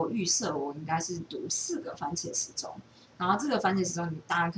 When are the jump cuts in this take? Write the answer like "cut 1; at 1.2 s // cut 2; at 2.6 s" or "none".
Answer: none